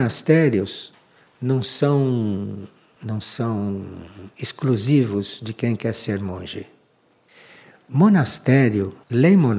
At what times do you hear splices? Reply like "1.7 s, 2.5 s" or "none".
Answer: none